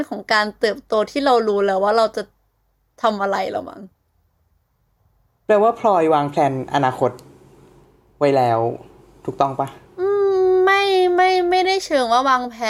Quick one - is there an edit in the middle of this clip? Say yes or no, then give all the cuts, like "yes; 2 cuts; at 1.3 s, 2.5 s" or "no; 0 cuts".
no; 0 cuts